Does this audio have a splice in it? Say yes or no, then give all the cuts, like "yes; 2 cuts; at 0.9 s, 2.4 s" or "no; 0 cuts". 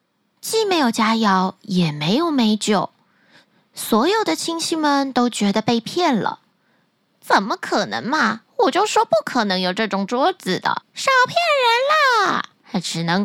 no; 0 cuts